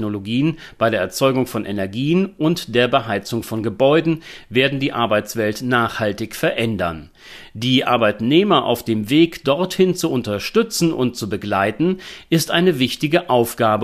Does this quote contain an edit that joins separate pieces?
no; 0 cuts

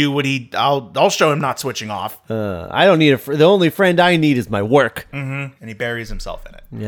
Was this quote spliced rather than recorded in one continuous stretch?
yes; 1 cut; at 5.6 s

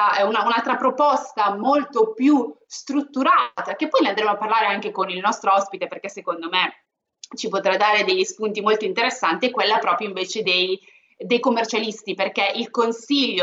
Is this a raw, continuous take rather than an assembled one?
yes; 0 cuts

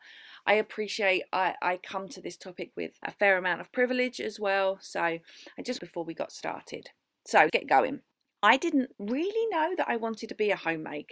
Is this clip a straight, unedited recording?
no; 5 cuts; at 3.0 s, 5.8 s, 7.5 s, 8.1 s, 8.9 s

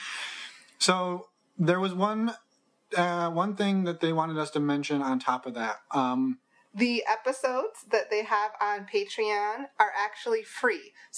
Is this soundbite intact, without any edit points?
yes; 0 cuts

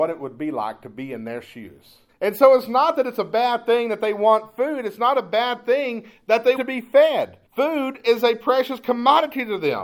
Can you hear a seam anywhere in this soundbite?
yes; 3 cuts; at 2.1 s, 6.6 s, 7.5 s

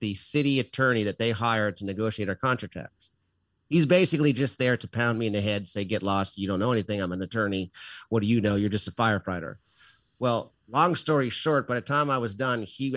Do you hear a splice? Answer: no; 0 cuts

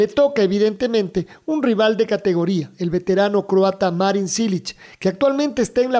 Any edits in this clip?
no; 0 cuts

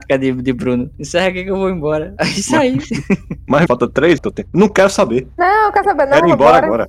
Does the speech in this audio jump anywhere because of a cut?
yes; 2 cuts; at 3.7 s, 4.2 s

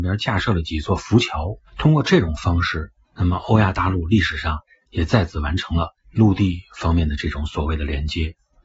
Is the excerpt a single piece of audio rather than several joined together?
no; 2 cuts; at 1.7 s, 3.0 s

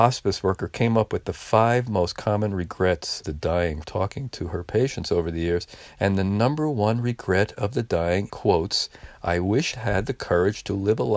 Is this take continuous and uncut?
no; 4 cuts; at 3.2 s, 3.8 s, 8.3 s, 9.7 s

